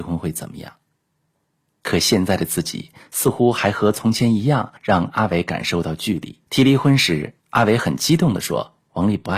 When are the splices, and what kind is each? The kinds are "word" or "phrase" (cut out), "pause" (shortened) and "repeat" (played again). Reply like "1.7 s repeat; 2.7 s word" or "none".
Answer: 4.8 s pause; 6.5 s pause; 7.4 s pause